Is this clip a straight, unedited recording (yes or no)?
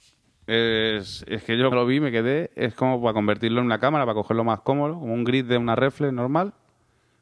no